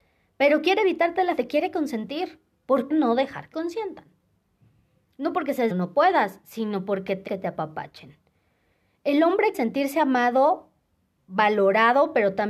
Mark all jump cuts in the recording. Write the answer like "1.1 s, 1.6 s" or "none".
1.4 s, 2.9 s, 3.5 s, 5.7 s, 7.3 s, 9.5 s